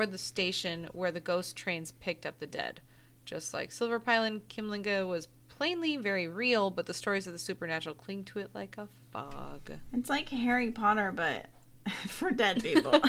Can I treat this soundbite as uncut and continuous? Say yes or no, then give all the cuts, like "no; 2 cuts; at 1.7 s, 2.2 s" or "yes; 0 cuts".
yes; 0 cuts